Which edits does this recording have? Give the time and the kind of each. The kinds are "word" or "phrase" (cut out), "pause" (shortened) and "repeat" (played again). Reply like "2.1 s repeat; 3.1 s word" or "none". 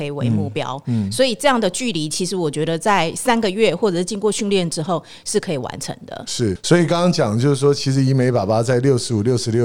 6.6 s word